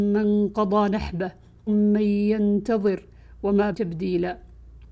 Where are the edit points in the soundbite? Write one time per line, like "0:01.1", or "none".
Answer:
0:01.7
0:03.7